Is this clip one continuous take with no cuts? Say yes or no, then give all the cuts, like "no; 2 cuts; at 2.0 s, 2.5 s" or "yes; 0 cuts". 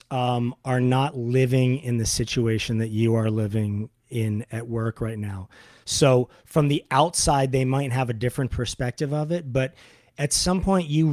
yes; 0 cuts